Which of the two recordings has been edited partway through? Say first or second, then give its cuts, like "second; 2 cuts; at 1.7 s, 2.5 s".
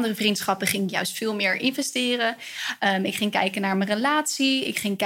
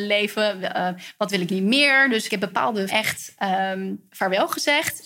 second; 3 cuts; at 1.5 s, 2.3 s, 2.9 s